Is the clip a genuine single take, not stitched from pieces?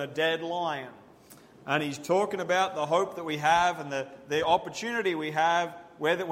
yes; 0 cuts

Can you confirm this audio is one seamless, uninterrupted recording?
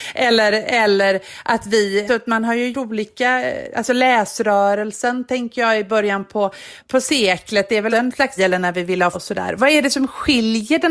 no; 6 cuts; at 2.1 s, 2.7 s, 6.8 s, 7.9 s, 8.4 s, 9.1 s

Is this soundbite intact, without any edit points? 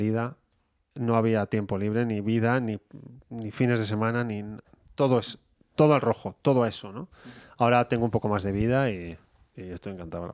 yes; 0 cuts

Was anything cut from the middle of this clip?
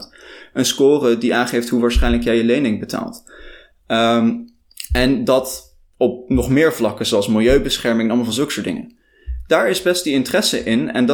no; 0 cuts

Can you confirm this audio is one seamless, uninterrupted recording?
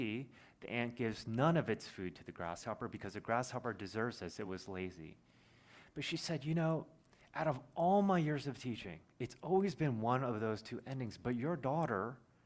yes; 0 cuts

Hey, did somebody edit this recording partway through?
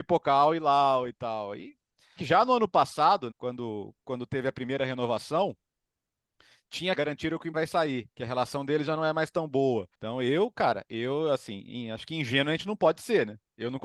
yes; 6 cuts; at 2.2 s, 3.3 s, 6.9 s, 7.5 s, 8.1 s, 9.9 s

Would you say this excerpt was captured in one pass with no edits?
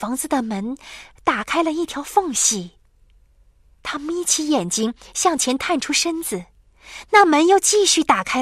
yes; 0 cuts

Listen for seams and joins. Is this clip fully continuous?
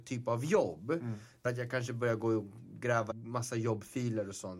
no; 2 cuts; at 1.4 s, 3.1 s

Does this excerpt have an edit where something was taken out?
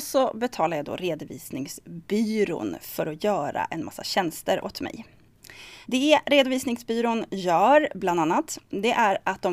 yes; 1 cut; at 5.8 s

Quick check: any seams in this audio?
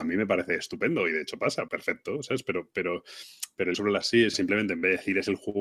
yes; 3 cuts; at 1.7 s, 3.7 s, 4.3 s

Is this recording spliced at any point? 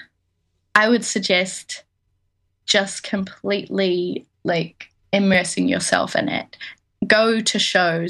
yes; 1 cut; at 4.3 s

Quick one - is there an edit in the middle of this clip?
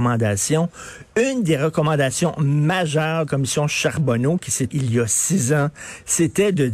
yes; 2 cuts; at 3.3 s, 4.7 s

